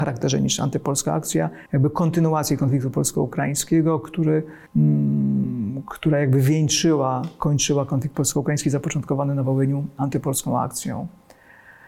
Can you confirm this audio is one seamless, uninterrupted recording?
no; 2 cuts; at 1.7 s, 4.7 s

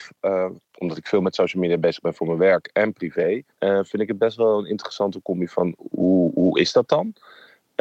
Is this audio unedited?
no; 1 cut; at 3.5 s

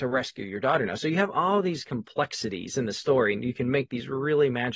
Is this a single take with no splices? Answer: yes; 0 cuts

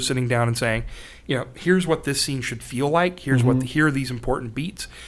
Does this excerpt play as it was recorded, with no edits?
yes; 0 cuts

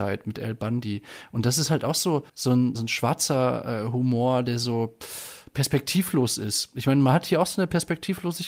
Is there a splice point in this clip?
yes; 2 cuts; at 2.3 s, 2.8 s

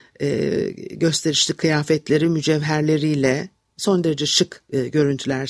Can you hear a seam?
no; 0 cuts

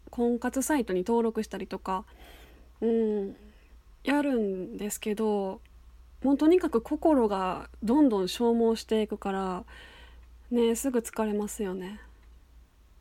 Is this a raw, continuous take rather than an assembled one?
yes; 0 cuts

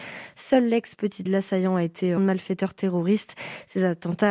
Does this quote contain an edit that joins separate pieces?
yes; 2 cuts; at 1.3 s, 2.2 s

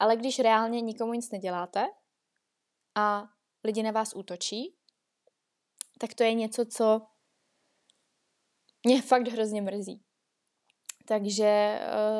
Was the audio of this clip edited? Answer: no; 0 cuts

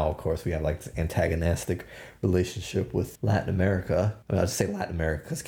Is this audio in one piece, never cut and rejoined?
no; 2 cuts; at 3.2 s, 4.2 s

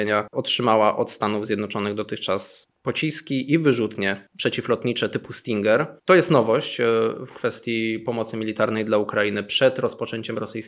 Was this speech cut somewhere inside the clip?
yes; 1 cut; at 6.0 s

